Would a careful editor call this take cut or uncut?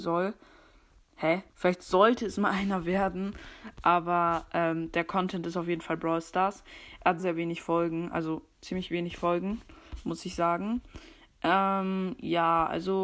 cut